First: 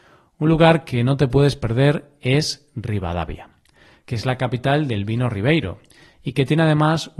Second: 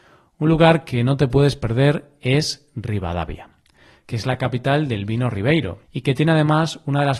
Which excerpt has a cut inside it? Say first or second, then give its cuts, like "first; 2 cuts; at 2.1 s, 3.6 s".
second; 1 cut; at 5.8 s